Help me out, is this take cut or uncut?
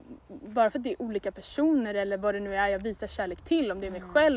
uncut